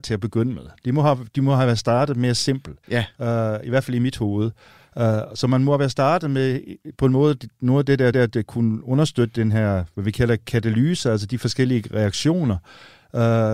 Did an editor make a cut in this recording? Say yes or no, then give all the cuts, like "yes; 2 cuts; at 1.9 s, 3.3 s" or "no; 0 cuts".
yes; 2 cuts; at 2.8 s, 8.1 s